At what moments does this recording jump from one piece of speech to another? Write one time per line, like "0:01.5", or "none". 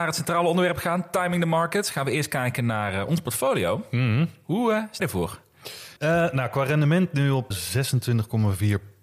0:05.0
0:06.0
0:07.5